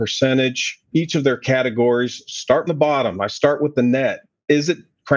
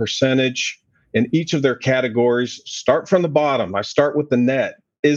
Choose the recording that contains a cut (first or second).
first